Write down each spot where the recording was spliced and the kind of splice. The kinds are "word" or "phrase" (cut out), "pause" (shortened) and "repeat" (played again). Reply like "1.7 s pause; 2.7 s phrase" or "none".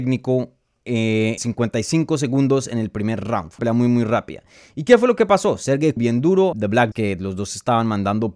1.4 s word; 3.6 s word; 6.0 s word; 6.5 s word; 6.9 s word